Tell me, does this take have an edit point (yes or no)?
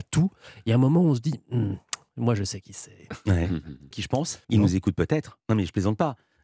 yes